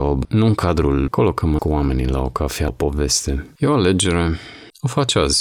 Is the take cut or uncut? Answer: cut